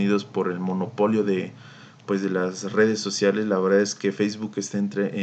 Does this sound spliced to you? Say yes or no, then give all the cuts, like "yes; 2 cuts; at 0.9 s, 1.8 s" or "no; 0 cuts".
no; 0 cuts